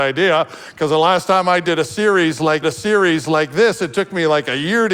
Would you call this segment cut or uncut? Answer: cut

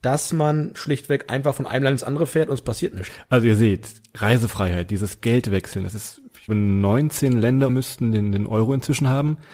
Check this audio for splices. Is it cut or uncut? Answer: cut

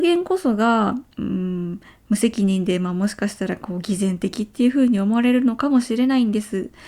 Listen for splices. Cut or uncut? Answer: cut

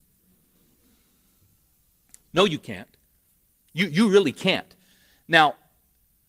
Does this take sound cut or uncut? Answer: cut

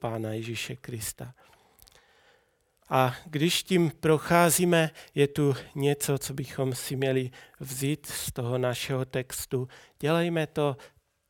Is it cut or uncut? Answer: uncut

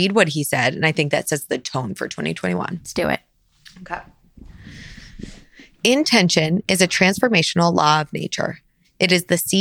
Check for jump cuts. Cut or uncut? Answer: uncut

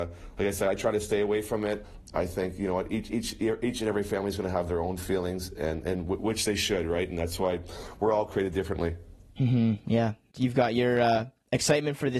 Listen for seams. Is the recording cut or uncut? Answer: uncut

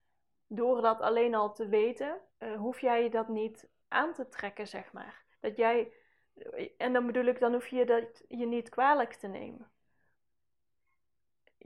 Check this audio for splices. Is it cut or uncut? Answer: cut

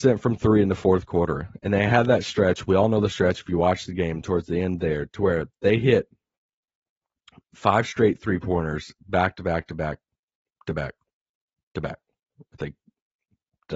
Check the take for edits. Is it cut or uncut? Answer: uncut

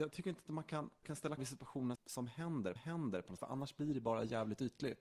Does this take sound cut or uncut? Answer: cut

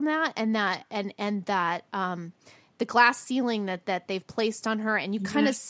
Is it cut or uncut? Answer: uncut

